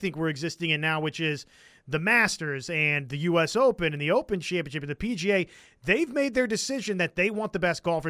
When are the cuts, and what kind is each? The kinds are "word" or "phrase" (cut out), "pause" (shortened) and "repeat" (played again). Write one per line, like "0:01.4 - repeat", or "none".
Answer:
none